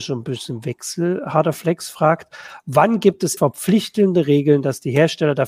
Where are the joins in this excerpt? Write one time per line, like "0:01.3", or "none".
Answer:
0:03.4